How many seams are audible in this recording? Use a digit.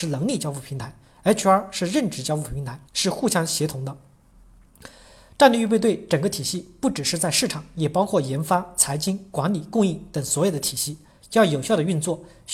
1